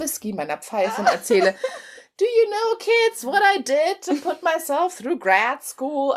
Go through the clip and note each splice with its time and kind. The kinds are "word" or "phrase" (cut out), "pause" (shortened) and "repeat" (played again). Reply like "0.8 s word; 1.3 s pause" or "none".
none